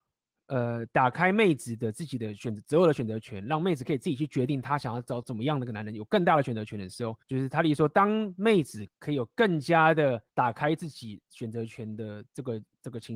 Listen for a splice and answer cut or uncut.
cut